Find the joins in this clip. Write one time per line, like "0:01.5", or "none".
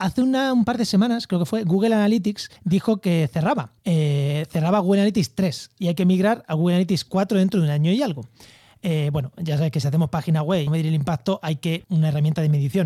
0:02.6
0:03.8
0:10.7
0:11.8